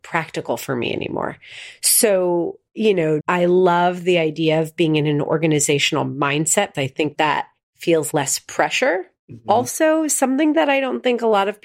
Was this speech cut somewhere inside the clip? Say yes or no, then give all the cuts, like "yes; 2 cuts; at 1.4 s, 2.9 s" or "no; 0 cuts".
yes; 4 cuts; at 3.2 s, 6.7 s, 7.1 s, 8.1 s